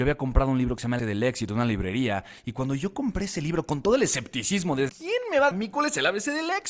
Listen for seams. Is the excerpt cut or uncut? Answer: cut